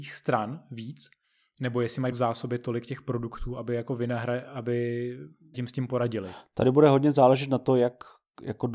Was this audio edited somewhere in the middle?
yes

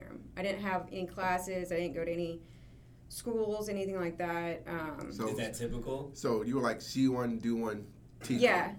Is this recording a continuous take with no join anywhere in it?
yes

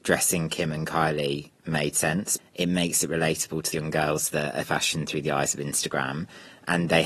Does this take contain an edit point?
yes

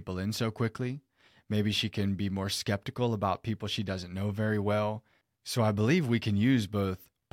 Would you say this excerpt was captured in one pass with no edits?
yes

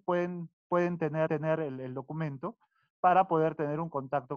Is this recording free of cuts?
no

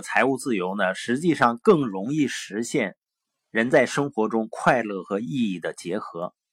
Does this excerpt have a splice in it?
no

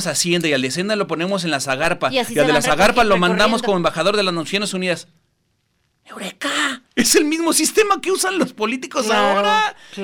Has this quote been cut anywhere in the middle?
yes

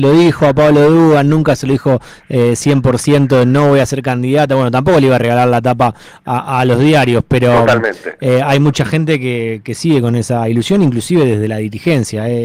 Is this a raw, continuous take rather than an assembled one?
yes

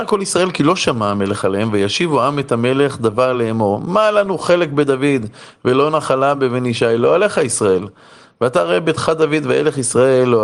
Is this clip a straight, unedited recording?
yes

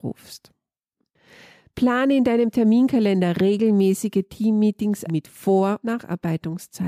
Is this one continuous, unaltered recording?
no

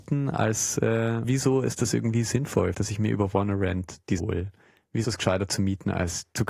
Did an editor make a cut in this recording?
yes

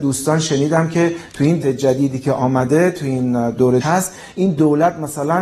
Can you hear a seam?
yes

